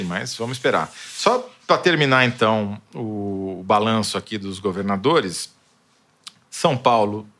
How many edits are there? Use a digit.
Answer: 0